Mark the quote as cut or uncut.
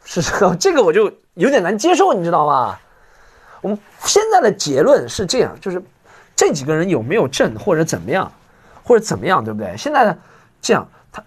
uncut